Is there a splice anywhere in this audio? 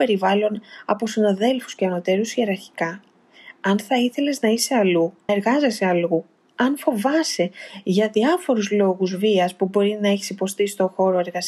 yes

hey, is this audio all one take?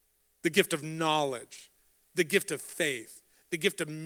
yes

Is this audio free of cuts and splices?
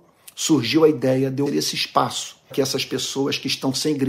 no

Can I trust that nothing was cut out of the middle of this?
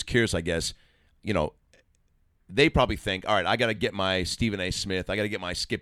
yes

